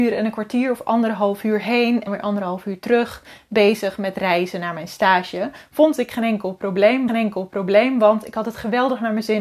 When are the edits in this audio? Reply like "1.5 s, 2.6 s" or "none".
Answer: 2.1 s, 7.1 s